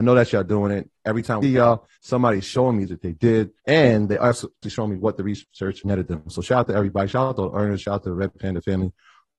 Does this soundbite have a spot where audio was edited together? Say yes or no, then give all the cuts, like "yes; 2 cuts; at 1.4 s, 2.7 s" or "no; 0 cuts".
yes; 6 cuts; at 1.4 s, 2.0 s, 2.9 s, 3.6 s, 4.6 s, 5.8 s